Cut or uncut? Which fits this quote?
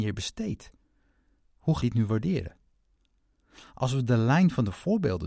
cut